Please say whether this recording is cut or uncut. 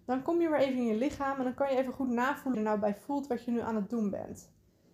cut